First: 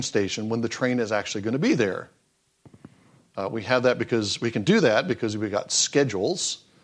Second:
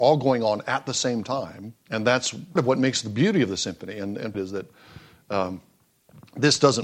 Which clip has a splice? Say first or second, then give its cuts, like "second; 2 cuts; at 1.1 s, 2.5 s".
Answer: second; 3 cuts; at 1.8 s, 2.6 s, 4.3 s